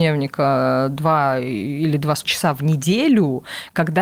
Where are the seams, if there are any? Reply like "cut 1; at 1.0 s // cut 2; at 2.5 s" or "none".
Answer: cut 1; at 2.2 s